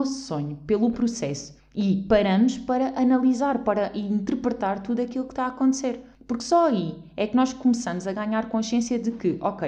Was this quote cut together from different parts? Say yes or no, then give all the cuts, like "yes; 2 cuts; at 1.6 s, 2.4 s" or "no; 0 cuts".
no; 0 cuts